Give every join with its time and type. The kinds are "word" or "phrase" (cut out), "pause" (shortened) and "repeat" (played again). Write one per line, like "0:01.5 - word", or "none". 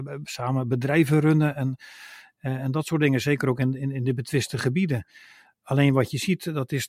none